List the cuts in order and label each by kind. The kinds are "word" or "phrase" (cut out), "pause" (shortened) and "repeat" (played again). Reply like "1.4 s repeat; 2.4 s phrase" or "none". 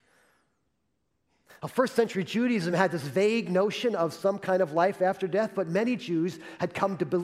none